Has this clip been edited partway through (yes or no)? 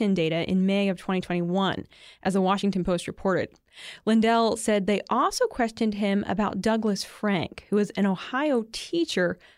no